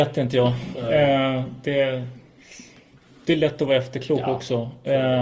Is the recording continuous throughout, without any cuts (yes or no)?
yes